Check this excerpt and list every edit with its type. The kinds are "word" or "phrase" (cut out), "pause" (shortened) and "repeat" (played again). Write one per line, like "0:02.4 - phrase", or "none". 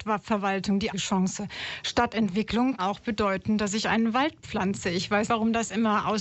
0:00.9 - word
0:02.8 - word
0:05.3 - word

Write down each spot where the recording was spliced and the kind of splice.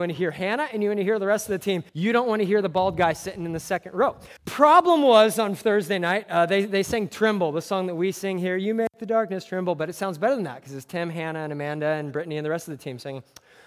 0:01.9 - pause
0:04.4 - pause

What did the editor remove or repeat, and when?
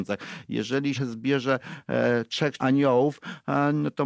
0:00.9 - word
0:02.6 - word

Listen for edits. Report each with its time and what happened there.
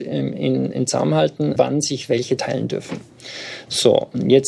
0:01.6 - word
0:02.4 - word

